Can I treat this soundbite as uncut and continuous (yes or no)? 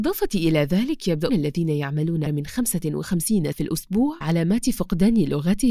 no